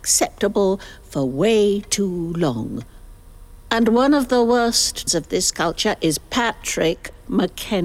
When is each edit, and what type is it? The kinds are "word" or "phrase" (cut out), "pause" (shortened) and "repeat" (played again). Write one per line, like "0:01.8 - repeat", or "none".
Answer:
0:05.1 - word